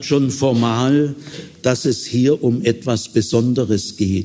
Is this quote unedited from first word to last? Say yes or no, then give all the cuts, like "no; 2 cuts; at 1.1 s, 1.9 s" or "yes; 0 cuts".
yes; 0 cuts